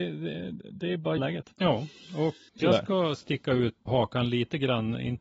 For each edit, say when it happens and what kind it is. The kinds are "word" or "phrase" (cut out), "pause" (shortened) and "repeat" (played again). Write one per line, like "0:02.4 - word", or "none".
0:01.2 - word
0:02.5 - word
0:03.9 - word